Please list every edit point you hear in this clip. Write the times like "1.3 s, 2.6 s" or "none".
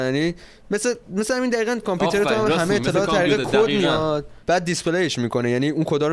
1.8 s, 4.4 s